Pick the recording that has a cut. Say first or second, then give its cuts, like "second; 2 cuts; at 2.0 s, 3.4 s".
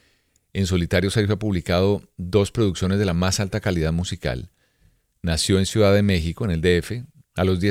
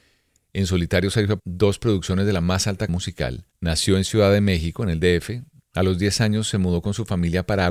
second; 3 cuts; at 1.4 s, 2.9 s, 3.5 s